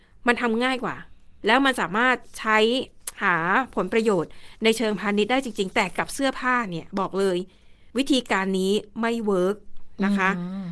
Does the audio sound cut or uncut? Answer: uncut